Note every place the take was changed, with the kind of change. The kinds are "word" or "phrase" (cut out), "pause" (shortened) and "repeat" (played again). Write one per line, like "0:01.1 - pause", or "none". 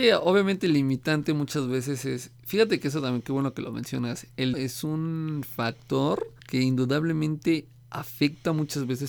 0:04.5 - word
0:06.4 - pause